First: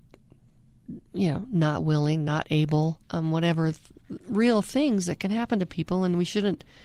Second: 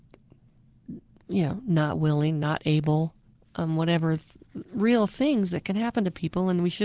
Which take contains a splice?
first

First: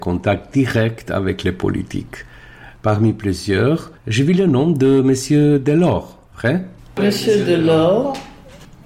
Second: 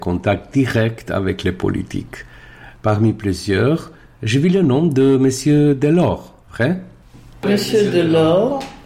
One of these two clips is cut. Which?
first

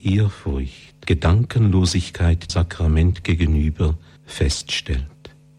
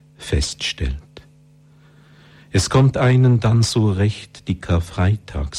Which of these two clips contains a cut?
first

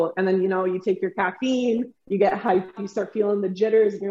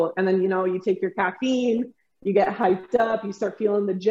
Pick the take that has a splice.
first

